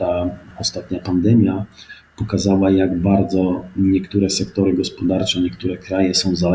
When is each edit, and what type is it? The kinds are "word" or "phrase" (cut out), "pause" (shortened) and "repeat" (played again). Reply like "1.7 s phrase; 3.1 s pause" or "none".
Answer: none